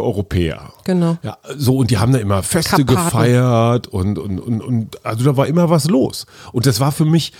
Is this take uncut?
yes; 0 cuts

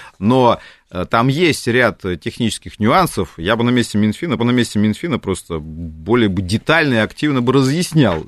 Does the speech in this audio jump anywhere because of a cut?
yes; 1 cut; at 4.4 s

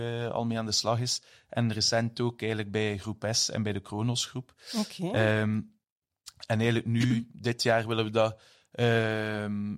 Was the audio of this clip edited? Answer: no; 0 cuts

